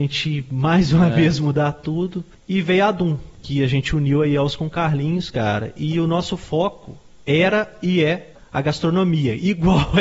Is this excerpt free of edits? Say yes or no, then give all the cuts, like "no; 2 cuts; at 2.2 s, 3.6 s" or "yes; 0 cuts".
yes; 0 cuts